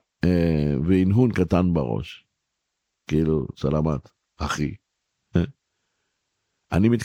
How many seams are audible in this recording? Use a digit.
0